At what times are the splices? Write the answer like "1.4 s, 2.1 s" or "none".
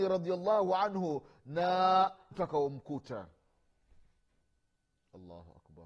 2.3 s